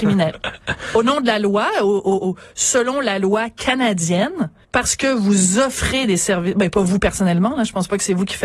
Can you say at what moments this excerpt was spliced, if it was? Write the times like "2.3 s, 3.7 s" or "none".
4.6 s